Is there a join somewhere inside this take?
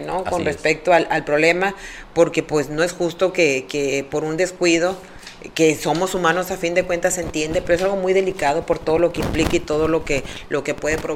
no; 0 cuts

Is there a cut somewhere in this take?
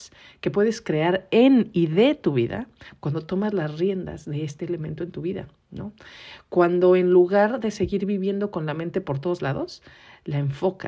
no; 0 cuts

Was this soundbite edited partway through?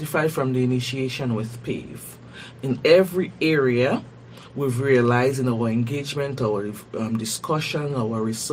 no; 0 cuts

